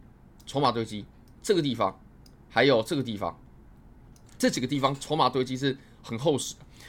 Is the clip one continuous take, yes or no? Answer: yes